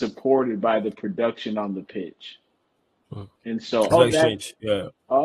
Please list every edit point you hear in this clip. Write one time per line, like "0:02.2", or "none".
0:03.4
0:03.9